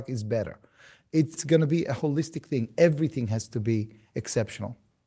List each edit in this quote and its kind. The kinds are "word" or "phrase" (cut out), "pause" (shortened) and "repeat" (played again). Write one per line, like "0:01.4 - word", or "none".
0:01.4 - word